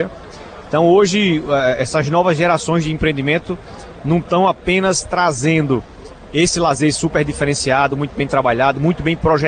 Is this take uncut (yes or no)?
yes